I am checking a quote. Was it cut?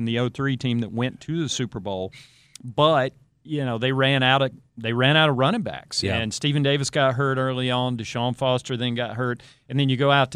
no; 0 cuts

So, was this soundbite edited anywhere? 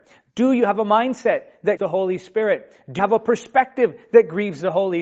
yes; 2 cuts; at 1.8 s, 3.0 s

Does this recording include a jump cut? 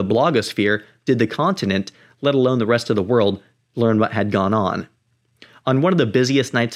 no; 0 cuts

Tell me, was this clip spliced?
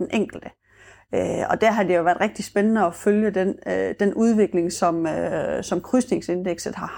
no; 0 cuts

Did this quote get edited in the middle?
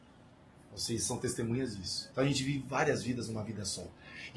yes; 1 cut; at 2.1 s

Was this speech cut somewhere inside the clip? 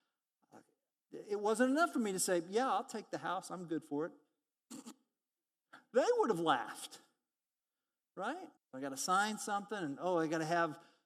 yes; 1 cut; at 8.6 s

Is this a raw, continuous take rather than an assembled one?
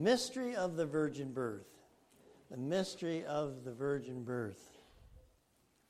yes; 0 cuts

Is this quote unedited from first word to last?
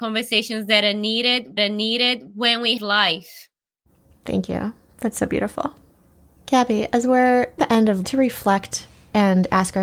no; 4 cuts; at 1.6 s, 2.8 s, 7.6 s, 8.0 s

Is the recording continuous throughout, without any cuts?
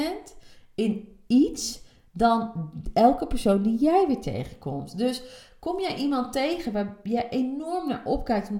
yes; 0 cuts

